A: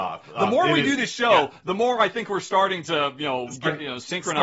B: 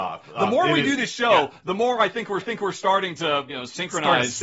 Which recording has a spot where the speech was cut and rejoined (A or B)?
B